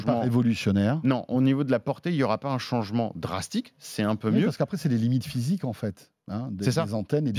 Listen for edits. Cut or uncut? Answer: uncut